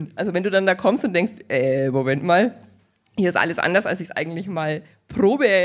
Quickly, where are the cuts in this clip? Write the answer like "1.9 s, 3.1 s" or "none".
none

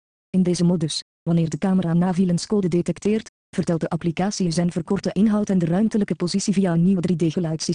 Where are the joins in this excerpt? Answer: none

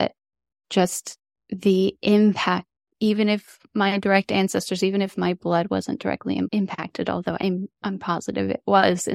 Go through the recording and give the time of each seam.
none

